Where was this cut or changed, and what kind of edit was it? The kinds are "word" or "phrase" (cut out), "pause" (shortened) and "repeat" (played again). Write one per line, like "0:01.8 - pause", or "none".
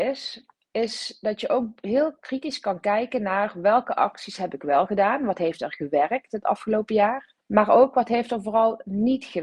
0:07.4 - pause

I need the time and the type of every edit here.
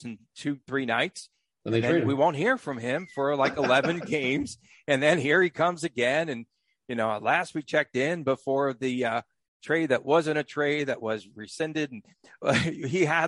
none

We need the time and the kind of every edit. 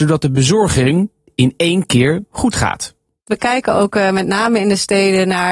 none

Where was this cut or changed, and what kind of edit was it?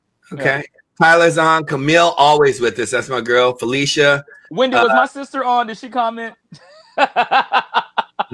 none

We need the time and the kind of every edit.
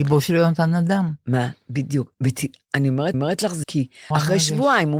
0:02.1 - pause
0:03.1 - repeat
0:03.6 - word
0:04.1 - word

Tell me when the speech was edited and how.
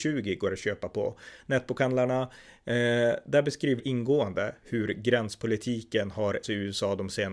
0:03.8 - word
0:06.4 - word

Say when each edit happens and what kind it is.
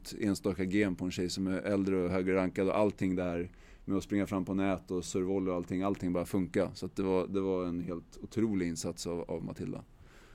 0:05.1 - word

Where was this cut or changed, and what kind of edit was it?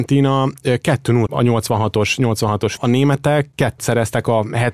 0:01.3 - word
0:02.8 - phrase
0:03.8 - word

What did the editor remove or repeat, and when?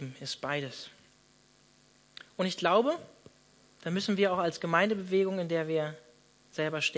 none

